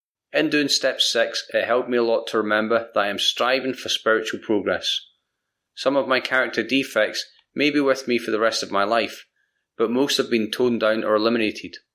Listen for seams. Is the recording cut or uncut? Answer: uncut